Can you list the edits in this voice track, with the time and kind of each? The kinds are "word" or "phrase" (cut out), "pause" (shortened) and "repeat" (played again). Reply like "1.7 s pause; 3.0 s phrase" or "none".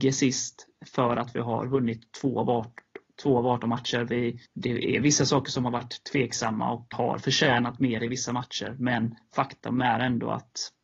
4.4 s pause; 6.9 s word